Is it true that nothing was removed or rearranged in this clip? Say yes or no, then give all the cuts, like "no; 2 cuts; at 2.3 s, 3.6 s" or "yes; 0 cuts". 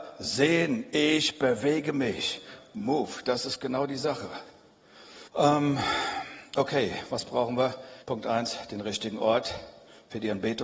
no; 2 cuts; at 5.3 s, 8.0 s